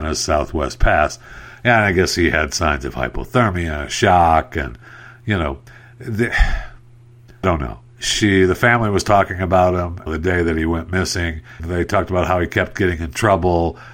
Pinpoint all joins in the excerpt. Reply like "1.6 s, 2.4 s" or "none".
7.4 s, 10.1 s, 11.6 s